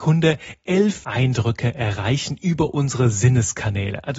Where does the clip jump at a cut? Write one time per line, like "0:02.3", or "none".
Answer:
0:01.0